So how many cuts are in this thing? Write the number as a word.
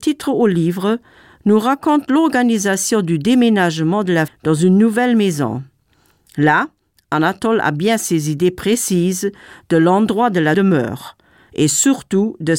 two